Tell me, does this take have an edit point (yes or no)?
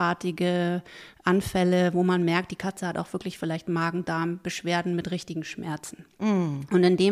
no